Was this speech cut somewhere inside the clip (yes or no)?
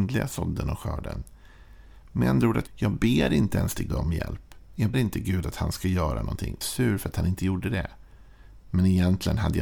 yes